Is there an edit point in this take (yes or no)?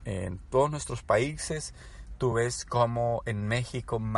no